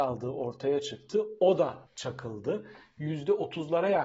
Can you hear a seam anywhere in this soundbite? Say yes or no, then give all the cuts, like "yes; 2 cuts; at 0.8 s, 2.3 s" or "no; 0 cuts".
yes; 1 cut; at 1.9 s